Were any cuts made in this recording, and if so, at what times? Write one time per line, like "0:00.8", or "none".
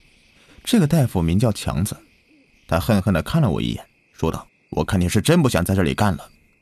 0:04.5